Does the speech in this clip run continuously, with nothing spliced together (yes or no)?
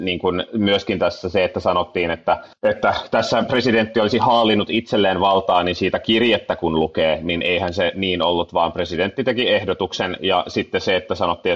no